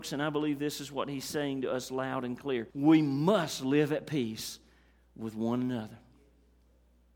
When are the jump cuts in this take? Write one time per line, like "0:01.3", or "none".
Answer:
0:02.7